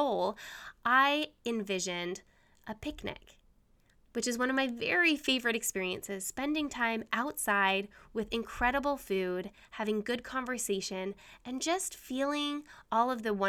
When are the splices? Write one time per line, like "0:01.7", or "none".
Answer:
none